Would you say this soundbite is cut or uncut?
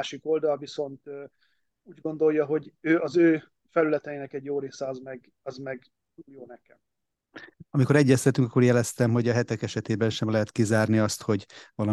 uncut